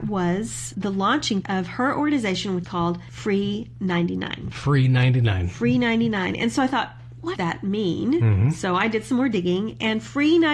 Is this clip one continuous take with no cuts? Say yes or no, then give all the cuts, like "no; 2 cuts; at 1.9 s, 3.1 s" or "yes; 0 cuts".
no; 3 cuts; at 1.4 s, 2.6 s, 7.4 s